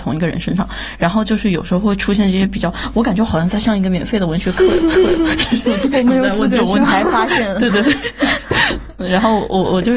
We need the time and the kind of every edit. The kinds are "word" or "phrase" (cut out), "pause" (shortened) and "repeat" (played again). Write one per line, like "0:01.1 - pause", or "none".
0:04.9 - repeat